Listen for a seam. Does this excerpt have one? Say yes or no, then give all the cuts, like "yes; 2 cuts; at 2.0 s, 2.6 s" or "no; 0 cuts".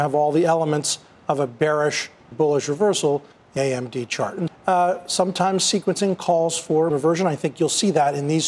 yes; 4 cuts; at 2.3 s, 3.6 s, 4.5 s, 6.9 s